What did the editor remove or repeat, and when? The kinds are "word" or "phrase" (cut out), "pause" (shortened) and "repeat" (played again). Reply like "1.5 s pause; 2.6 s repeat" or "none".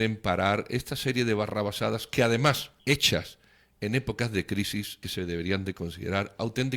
2.8 s pause; 5.0 s phrase